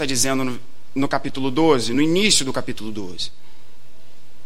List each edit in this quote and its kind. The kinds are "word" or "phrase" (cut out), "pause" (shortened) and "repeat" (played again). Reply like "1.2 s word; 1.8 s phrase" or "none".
none